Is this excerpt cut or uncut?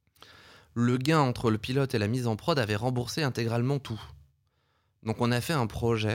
uncut